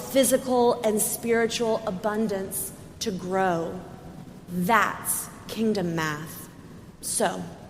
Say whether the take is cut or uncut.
uncut